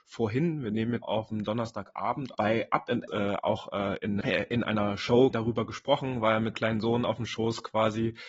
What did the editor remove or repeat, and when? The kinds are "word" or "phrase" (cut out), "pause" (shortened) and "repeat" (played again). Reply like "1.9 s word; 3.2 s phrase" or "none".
1.0 s word; 2.3 s word; 3.1 s word; 3.4 s word; 4.2 s word; 5.3 s word; 6.5 s word